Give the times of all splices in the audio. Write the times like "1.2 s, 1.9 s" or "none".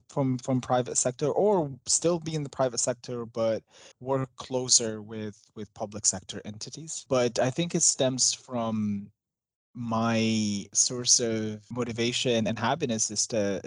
3.9 s